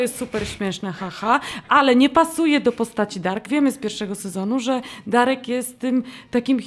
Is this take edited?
yes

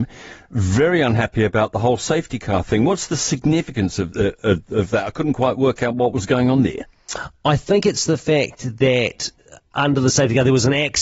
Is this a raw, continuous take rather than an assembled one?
yes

